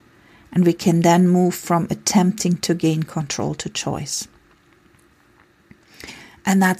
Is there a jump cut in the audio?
no; 0 cuts

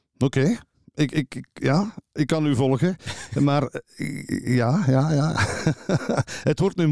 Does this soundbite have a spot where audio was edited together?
no; 0 cuts

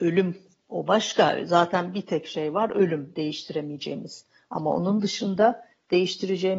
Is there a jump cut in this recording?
no; 0 cuts

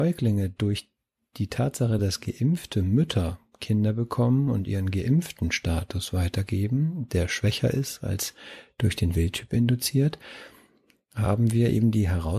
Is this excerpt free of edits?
yes; 0 cuts

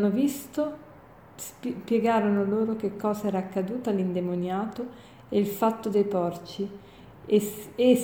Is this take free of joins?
yes; 0 cuts

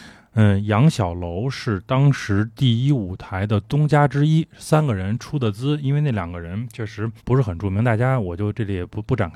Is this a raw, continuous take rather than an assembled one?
no; 1 cut; at 7.2 s

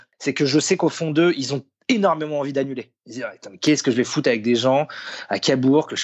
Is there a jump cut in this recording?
no; 0 cuts

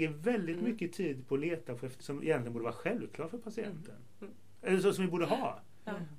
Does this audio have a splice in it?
yes; 1 cut; at 2.0 s

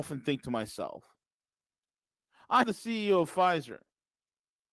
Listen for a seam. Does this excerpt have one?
yes; 1 cut; at 2.6 s

